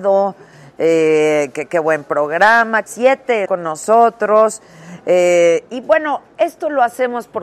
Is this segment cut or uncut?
cut